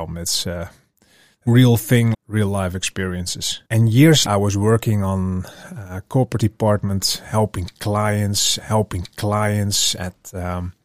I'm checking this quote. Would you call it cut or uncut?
cut